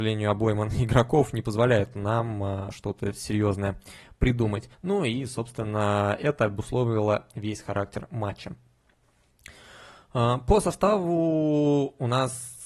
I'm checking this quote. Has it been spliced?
yes; 1 cut; at 4.7 s

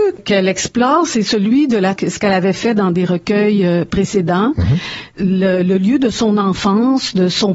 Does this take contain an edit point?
yes; 1 cut; at 2.0 s

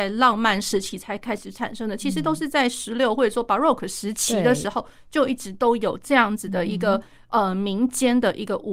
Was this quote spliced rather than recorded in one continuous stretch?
no; 0 cuts

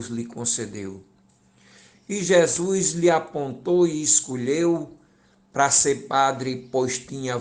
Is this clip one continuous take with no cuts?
yes; 0 cuts

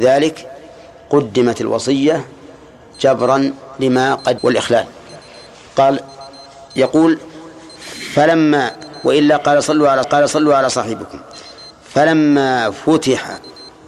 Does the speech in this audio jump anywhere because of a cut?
yes; 3 cuts; at 4.4 s, 6.7 s, 10.0 s

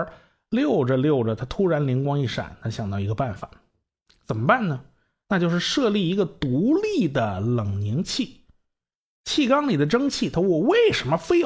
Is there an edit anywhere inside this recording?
no; 0 cuts

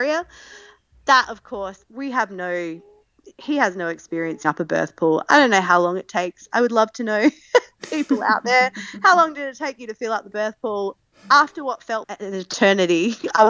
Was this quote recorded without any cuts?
no; 3 cuts; at 1.8 s, 4.4 s, 12.0 s

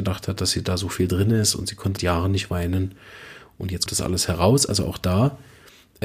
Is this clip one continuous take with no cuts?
no; 2 cuts; at 2.0 s, 3.9 s

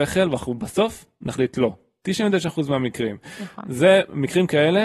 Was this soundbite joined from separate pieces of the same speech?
no; 0 cuts

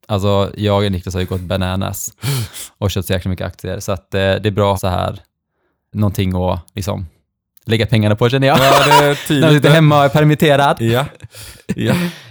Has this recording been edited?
yes; 2 cuts; at 4.7 s, 5.9 s

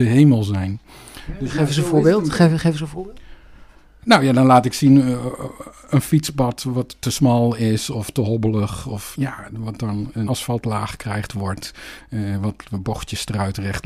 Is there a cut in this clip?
yes; 3 cuts; at 9.1 s, 10.3 s, 11.3 s

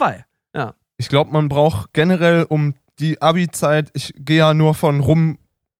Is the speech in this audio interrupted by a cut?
no; 0 cuts

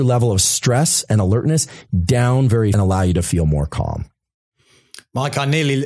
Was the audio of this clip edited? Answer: yes; 1 cut; at 2.7 s

